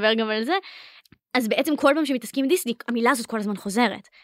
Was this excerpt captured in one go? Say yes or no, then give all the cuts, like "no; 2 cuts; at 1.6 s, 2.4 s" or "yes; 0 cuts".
yes; 0 cuts